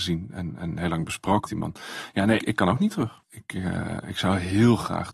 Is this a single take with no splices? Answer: no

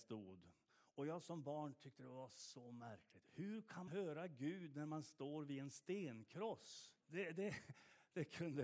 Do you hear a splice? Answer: yes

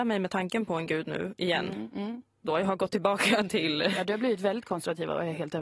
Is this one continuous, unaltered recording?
yes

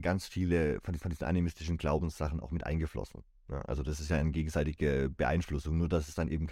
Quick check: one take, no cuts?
no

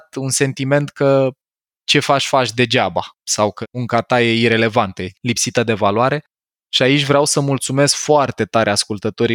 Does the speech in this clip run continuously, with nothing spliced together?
yes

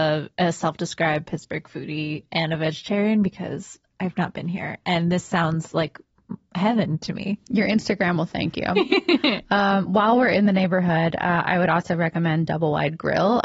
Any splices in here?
no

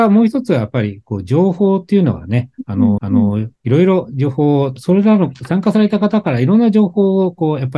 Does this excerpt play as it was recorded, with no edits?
no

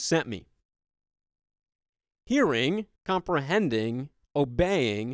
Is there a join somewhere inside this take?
yes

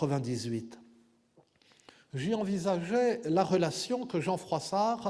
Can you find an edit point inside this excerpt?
no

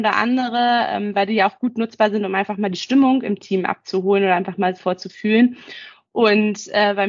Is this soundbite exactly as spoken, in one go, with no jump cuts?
yes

